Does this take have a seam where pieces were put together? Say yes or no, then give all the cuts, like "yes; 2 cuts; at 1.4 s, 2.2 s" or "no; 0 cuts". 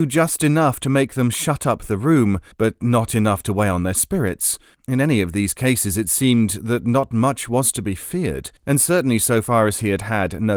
yes; 3 cuts; at 2.5 s, 4.7 s, 8.6 s